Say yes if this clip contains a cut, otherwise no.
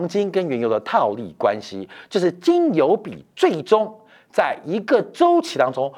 no